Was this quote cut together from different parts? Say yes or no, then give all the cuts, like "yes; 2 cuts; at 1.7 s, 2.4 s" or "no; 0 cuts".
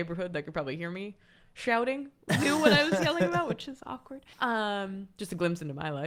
no; 0 cuts